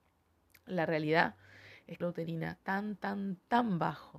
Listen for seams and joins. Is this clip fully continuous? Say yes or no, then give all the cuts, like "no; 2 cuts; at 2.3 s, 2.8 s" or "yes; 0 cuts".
no; 2 cuts; at 2.0 s, 2.6 s